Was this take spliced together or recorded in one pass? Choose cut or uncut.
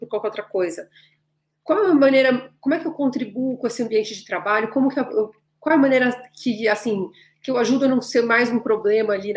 uncut